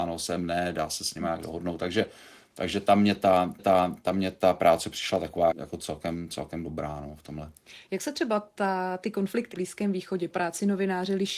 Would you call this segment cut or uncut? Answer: cut